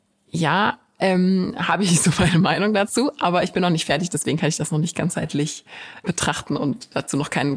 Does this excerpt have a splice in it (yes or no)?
yes